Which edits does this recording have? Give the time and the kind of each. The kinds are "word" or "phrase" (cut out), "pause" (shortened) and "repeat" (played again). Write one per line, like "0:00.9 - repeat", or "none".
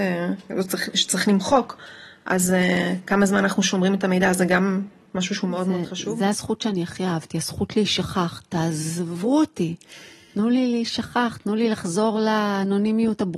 none